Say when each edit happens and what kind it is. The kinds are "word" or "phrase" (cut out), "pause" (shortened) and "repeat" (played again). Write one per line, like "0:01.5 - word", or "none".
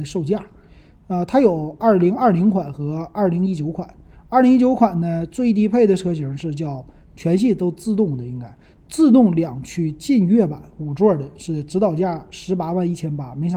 none